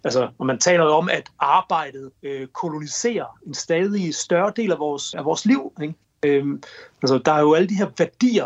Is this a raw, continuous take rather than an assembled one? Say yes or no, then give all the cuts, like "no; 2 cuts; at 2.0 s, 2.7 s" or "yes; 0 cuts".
no; 3 cuts; at 2.1 s, 5.1 s, 6.0 s